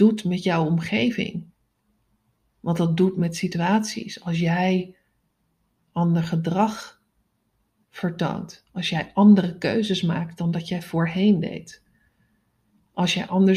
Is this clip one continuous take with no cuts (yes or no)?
yes